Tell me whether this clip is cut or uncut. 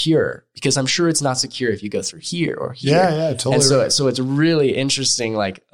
uncut